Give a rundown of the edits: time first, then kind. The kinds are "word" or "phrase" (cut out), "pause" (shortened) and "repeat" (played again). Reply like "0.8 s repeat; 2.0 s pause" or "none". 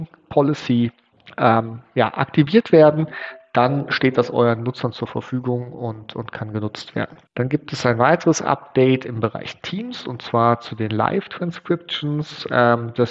1.1 s pause; 7.3 s pause